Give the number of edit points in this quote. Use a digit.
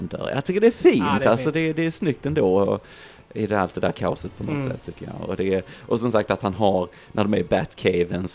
0